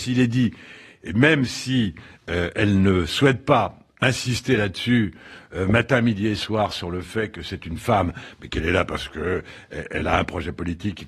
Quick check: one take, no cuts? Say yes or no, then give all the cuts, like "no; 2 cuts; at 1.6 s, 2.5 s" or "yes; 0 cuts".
yes; 0 cuts